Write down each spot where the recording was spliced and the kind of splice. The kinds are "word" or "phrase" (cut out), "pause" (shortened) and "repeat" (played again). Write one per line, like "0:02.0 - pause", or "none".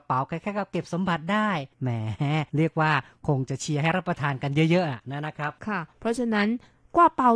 0:01.7 - pause
0:02.5 - pause
0:05.6 - pause